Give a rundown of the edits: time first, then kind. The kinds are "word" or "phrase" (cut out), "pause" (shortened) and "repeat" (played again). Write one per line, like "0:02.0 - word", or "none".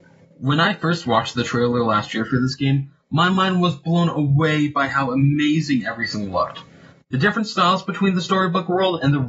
none